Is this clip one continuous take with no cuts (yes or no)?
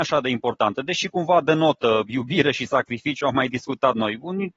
yes